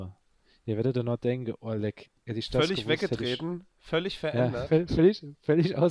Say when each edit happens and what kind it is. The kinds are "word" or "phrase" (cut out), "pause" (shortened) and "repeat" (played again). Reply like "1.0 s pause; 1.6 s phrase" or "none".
3.7 s pause